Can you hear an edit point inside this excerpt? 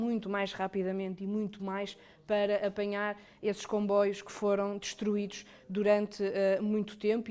no; 0 cuts

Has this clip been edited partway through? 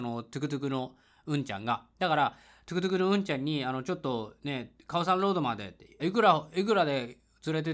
yes; 1 cut; at 6.0 s

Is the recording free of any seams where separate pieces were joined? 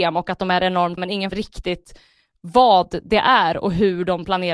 no; 2 cuts; at 1.0 s, 1.3 s

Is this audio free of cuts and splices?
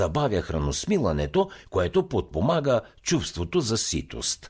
yes; 0 cuts

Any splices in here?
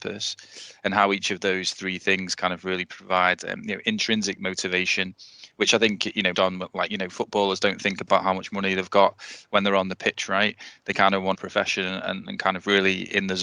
yes; 2 cuts; at 6.3 s, 11.3 s

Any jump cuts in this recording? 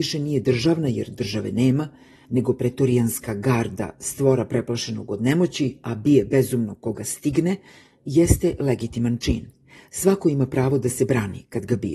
no; 0 cuts

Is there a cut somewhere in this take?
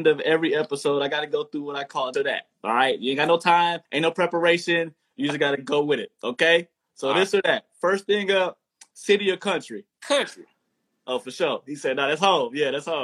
yes; 3 cuts; at 2.1 s, 3.8 s, 9.9 s

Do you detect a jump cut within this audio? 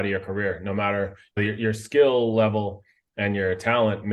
yes; 1 cut; at 1.4 s

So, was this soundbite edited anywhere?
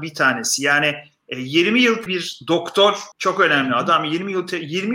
yes; 2 cuts; at 2.1 s, 3.1 s

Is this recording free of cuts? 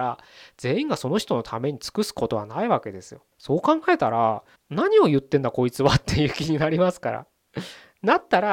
no; 2 cuts; at 3.3 s, 4.6 s

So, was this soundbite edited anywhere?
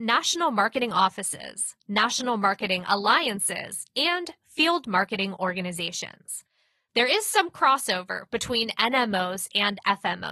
no; 0 cuts

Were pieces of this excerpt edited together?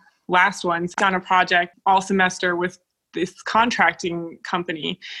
yes; 1 cut; at 1.0 s

